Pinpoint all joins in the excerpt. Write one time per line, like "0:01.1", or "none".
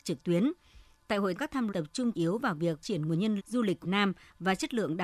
0:01.4
0:01.7
0:02.1
0:02.8
0:03.4
0:03.8